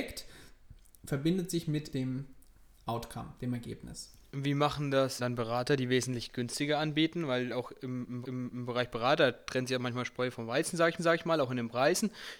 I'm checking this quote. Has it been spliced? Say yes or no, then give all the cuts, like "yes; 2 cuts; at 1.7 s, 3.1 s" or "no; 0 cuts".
yes; 4 cuts; at 1.9 s, 5.2 s, 8.2 s, 11.0 s